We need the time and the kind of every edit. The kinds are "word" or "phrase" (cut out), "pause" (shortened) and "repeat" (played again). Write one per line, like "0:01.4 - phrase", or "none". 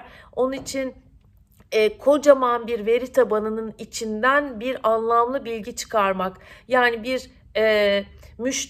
none